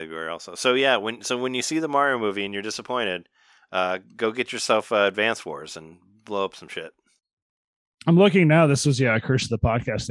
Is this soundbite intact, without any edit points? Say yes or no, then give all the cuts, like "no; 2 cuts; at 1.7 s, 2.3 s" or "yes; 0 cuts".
yes; 0 cuts